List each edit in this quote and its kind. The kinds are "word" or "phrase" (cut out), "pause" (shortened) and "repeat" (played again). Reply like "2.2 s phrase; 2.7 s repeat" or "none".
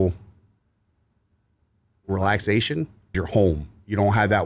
3.1 s word